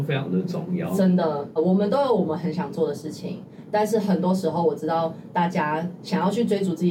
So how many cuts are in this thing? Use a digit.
1